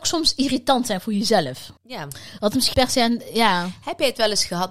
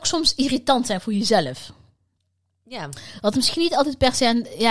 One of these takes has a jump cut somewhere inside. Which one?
first; 2 cuts; at 1.8 s, 2.7 s

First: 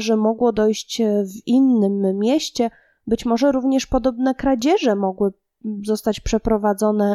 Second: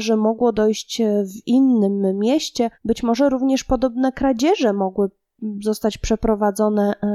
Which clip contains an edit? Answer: second; 1 cut; at 2.7 s

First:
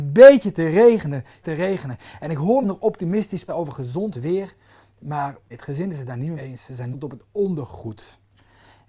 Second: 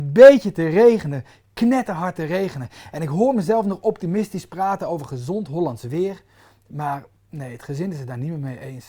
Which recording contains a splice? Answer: first; 7 cuts; at 1.4 s, 2.6 s, 3.5 s, 4.1 s, 5.5 s, 6.4 s, 6.9 s

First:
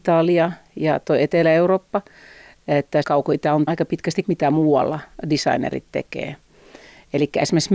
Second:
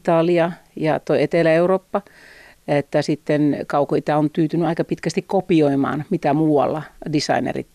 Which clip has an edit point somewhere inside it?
first; 3 cuts; at 3.0 s, 3.7 s, 4.2 s

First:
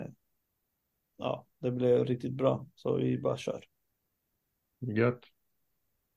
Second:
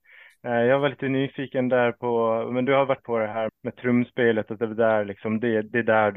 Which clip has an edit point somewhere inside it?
second; 2 cuts; at 3.0 s, 3.5 s

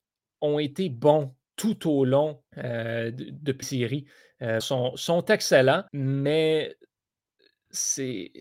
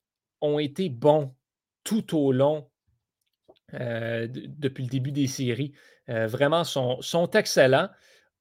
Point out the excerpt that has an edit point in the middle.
first; 5 cuts; at 1.4 s, 2.5 s, 3.6 s, 4.6 s, 5.9 s

